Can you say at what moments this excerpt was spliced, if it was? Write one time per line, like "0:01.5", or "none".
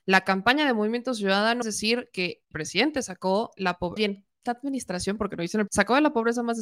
0:01.6
0:02.5
0:03.6
0:04.0
0:04.5
0:05.7

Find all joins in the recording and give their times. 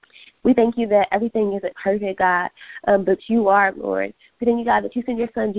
none

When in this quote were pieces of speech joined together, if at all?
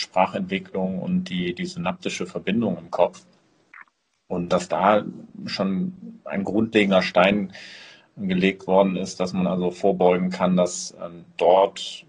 none

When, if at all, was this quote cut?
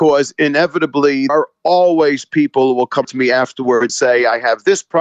0:01.3
0:03.0
0:03.9

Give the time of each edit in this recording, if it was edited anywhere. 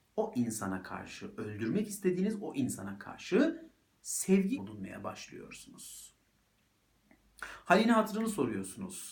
0:04.6

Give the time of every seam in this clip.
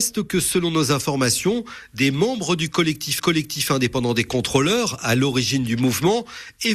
0:03.2

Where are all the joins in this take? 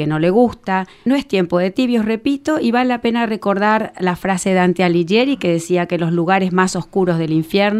0:01.1

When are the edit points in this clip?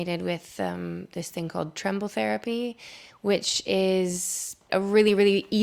0:04.7

